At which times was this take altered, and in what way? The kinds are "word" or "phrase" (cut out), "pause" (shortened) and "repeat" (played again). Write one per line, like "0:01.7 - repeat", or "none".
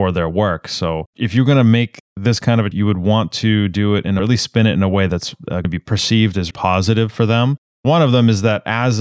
0:02.7 - word
0:04.2 - phrase
0:05.6 - word
0:06.5 - word